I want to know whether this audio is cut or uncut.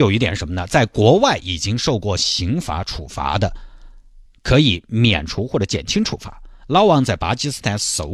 cut